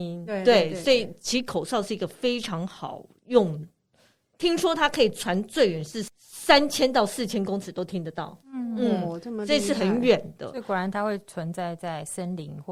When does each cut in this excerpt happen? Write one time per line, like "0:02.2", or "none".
0:08.4